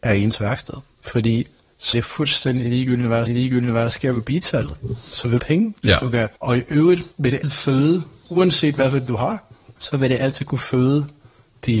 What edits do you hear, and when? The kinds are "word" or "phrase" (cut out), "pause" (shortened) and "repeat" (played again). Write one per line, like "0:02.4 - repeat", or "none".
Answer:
0:00.9 - pause
0:01.9 - word
0:03.3 - repeat
0:05.4 - phrase
0:06.4 - pause
0:07.1 - pause
0:07.4 - word
0:09.1 - word
0:09.8 - pause